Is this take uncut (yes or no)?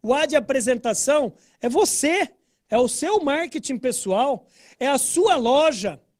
yes